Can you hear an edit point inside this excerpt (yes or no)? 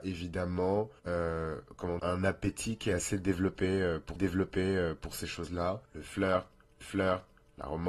yes